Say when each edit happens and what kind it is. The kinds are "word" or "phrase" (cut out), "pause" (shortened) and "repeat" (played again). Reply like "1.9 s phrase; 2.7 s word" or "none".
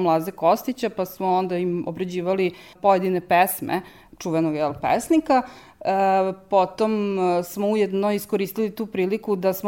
none